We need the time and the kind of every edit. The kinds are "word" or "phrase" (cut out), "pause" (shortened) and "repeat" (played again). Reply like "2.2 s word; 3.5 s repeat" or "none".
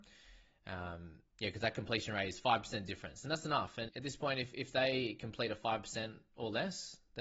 3.9 s word